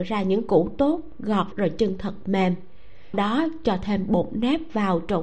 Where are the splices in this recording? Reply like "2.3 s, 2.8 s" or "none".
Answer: 1.5 s, 3.1 s